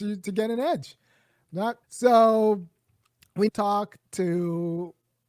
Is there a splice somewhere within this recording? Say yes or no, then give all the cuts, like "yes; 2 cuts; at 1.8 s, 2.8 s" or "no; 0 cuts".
yes; 2 cuts; at 1.8 s, 3.5 s